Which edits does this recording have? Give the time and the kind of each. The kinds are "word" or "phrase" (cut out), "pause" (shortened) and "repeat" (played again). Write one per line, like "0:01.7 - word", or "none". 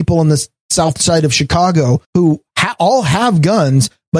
0:02.0 - pause